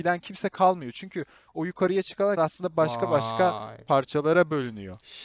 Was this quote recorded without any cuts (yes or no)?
no